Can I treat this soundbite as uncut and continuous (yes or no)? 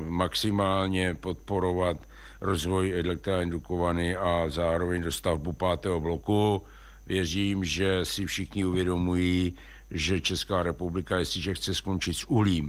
yes